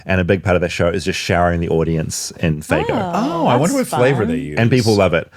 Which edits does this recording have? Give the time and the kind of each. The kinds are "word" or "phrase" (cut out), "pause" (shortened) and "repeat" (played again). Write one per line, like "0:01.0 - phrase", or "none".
none